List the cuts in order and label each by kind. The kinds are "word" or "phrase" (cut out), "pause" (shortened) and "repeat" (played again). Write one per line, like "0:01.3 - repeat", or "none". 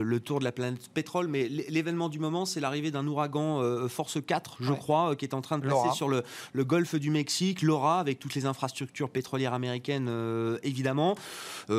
none